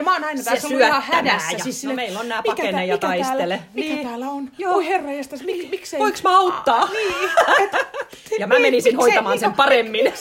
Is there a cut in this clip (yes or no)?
no